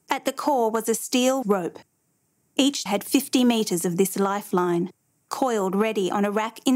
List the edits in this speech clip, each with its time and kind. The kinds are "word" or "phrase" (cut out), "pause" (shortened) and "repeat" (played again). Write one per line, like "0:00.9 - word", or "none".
0:01.4 - word
0:02.9 - word

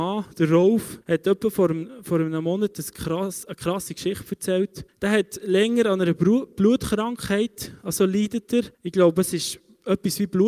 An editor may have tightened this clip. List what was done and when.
0:01.0 - pause
0:04.9 - pause
0:08.7 - pause

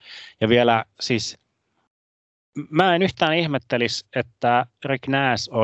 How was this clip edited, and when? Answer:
none

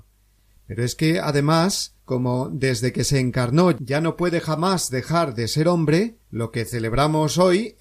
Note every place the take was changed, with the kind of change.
0:02.0 - pause
0:06.2 - pause

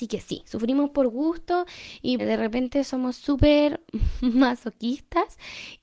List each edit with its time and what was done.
0:02.2 - word

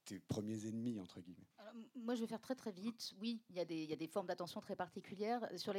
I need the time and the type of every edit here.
0:01.5 - pause

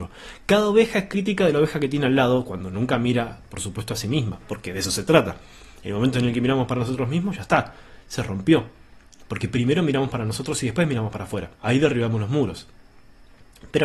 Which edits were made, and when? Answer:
0:11.5 - pause

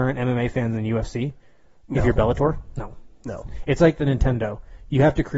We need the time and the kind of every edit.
none

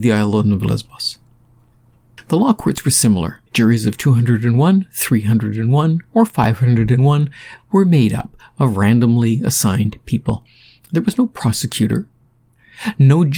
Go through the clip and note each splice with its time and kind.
0:03.5 - pause

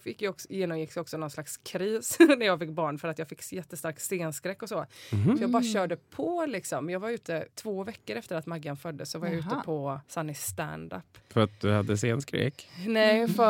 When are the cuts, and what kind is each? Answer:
0:07.5 - pause
0:10.0 - pause
0:11.2 - pause

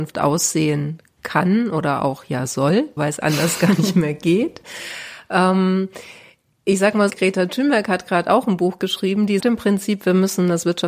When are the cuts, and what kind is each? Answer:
0:03.0 - word
0:07.1 - word
0:09.4 - word

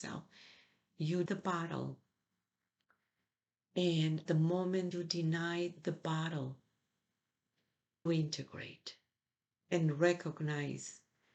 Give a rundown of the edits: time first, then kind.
0:01.3 - word
0:04.2 - word
0:04.9 - word
0:08.1 - word

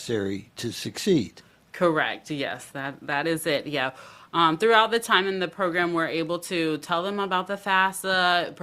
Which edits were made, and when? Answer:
none

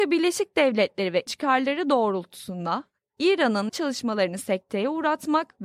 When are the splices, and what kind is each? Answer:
0:01.3 - word
0:03.7 - word

